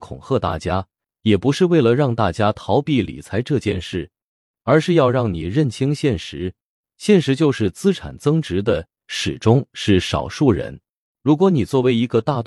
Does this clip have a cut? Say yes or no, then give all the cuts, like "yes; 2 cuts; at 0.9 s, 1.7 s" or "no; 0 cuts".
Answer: no; 0 cuts